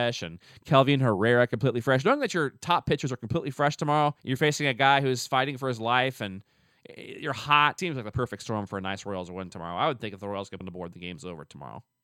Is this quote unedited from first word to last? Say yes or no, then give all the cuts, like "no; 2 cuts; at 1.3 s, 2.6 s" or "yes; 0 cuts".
no; 3 cuts; at 4.2 s, 7.8 s, 10.6 s